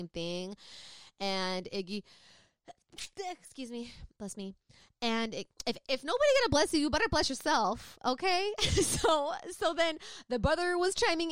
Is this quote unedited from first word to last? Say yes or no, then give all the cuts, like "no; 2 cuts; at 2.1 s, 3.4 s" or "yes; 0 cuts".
yes; 0 cuts